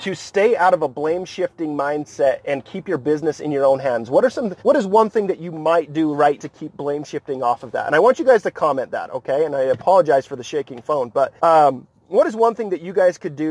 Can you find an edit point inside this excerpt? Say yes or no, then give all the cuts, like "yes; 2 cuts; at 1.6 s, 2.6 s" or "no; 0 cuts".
yes; 3 cuts; at 4.6 s, 6.4 s, 11.4 s